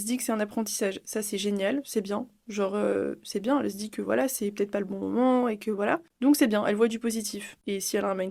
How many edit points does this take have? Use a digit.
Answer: 0